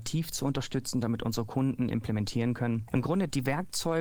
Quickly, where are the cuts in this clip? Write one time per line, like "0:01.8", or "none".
0:01.9